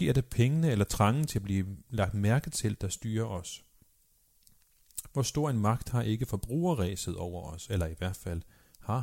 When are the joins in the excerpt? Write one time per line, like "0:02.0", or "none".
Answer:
none